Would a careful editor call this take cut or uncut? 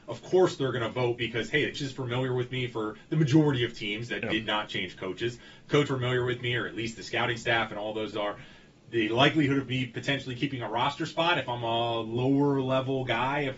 cut